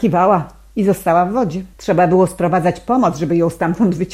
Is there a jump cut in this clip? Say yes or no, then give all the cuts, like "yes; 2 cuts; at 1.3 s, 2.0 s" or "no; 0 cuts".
yes; 1 cut; at 1.7 s